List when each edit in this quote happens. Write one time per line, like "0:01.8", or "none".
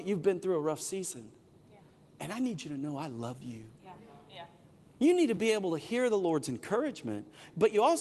none